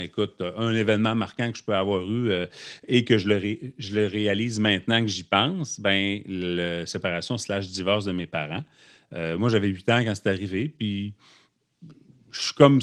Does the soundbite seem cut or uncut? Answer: uncut